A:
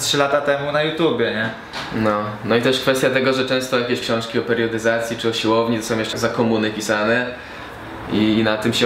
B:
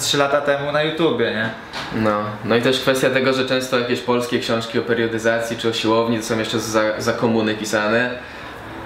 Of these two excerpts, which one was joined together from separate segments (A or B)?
A